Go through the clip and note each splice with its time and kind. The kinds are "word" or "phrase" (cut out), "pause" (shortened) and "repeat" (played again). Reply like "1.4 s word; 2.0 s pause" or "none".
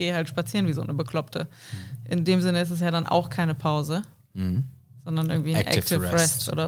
none